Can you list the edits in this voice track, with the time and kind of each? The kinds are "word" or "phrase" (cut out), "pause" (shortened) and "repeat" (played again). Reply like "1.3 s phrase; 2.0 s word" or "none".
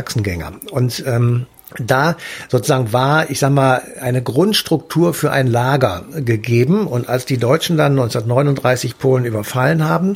1.6 s pause